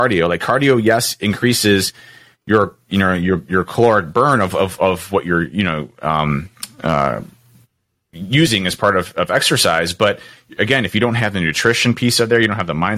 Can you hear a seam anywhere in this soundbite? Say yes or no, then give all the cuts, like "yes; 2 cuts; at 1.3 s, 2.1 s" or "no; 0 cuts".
no; 0 cuts